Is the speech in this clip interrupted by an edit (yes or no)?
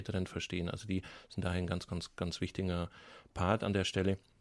no